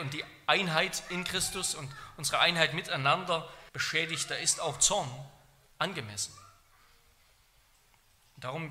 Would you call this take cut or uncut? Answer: cut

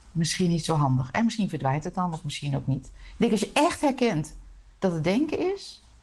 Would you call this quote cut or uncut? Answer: uncut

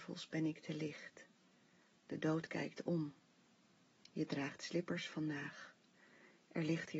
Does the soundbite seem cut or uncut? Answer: uncut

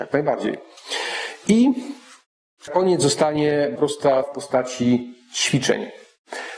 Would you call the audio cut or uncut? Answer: cut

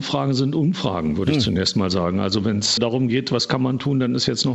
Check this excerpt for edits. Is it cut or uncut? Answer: cut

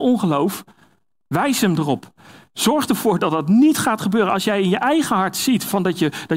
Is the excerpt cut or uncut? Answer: uncut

